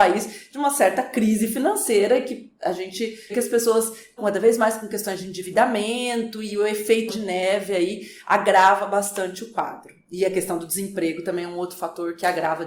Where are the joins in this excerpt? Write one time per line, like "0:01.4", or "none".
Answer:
0:03.3
0:04.2
0:07.1